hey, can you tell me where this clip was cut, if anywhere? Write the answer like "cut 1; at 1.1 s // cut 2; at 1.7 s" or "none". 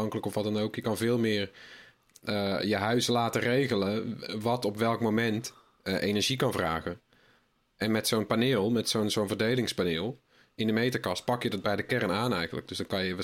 none